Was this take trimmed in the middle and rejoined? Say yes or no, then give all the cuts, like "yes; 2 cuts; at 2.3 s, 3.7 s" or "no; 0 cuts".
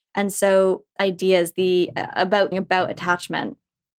yes; 2 cuts; at 1.0 s, 2.5 s